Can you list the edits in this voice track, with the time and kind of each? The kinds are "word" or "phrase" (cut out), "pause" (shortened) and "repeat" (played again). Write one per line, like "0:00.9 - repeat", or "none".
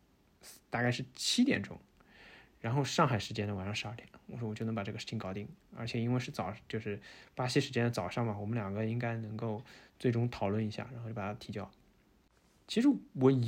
none